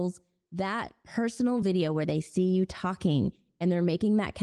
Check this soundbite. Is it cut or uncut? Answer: uncut